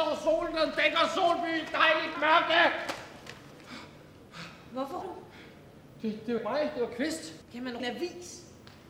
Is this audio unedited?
no; 5 cuts; at 2.1 s, 5.0 s, 6.4 s, 7.4 s, 7.8 s

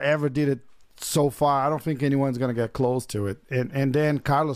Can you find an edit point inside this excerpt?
no; 0 cuts

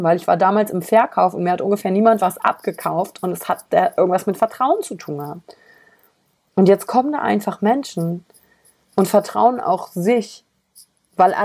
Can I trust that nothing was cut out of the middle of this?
yes; 0 cuts

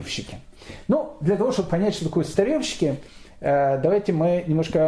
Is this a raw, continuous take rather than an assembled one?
yes; 0 cuts

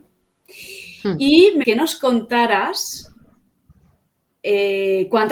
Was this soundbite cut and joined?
yes; 1 cut; at 1.6 s

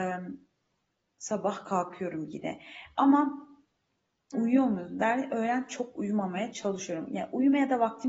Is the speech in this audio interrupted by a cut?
yes; 1 cut; at 4.3 s

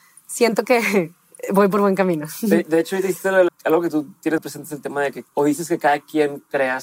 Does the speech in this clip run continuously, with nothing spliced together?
no; 3 cuts; at 3.5 s, 4.4 s, 5.3 s

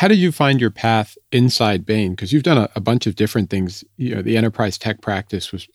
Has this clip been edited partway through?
no; 0 cuts

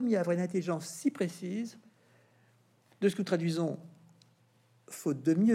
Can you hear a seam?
no; 0 cuts

